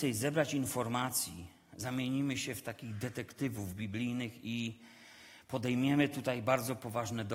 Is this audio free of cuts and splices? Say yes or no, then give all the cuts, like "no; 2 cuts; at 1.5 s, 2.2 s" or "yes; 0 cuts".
yes; 0 cuts